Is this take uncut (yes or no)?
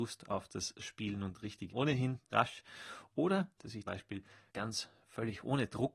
no